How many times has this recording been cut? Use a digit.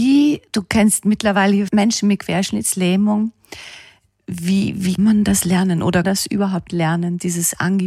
3